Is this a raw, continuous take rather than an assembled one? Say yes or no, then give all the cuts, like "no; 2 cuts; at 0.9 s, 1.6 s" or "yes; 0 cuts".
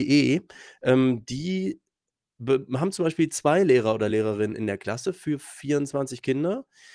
yes; 0 cuts